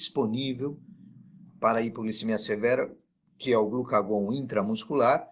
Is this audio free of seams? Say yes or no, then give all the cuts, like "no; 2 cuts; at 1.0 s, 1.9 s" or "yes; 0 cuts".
yes; 0 cuts